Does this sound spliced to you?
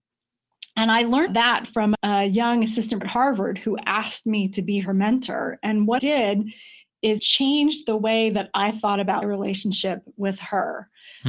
yes; 6 cuts; at 1.3 s, 1.9 s, 3.0 s, 6.0 s, 7.2 s, 9.2 s

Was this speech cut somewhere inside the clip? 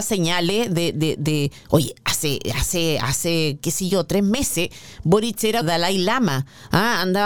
yes; 1 cut; at 5.6 s

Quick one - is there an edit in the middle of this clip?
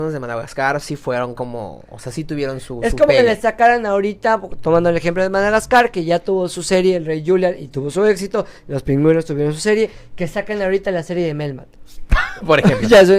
no; 0 cuts

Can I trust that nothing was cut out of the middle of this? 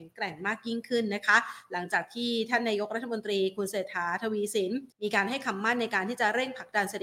no; 1 cut; at 4.9 s

